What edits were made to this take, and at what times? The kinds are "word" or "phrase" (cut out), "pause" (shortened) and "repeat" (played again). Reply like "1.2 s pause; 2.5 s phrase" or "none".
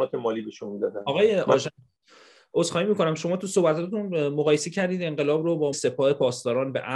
5.7 s phrase